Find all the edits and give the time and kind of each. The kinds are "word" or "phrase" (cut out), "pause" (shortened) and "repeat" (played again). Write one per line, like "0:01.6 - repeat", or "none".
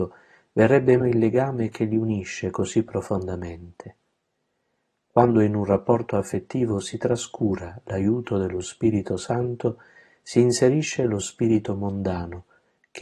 0:01.0 - word